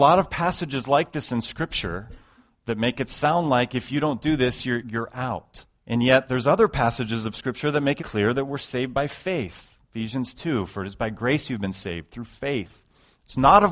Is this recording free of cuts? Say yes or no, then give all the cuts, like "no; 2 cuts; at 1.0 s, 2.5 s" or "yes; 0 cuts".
no; 3 cuts; at 4.8 s, 5.7 s, 8.0 s